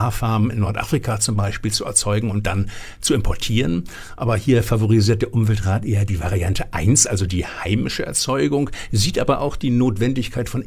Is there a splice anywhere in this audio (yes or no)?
no